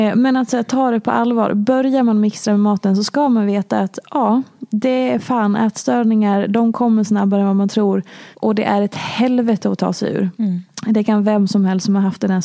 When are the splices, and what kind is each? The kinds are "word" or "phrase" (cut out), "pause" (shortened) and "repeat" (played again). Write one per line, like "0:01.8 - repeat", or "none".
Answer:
0:08.3 - pause
0:10.3 - pause